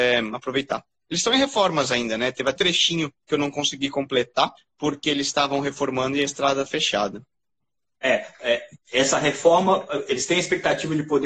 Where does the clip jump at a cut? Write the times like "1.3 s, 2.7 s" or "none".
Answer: 2.6 s, 3.2 s, 4.6 s, 6.7 s